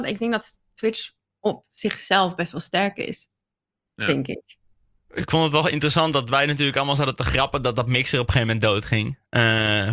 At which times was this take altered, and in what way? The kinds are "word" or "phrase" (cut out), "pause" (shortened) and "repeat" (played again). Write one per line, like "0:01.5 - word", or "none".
none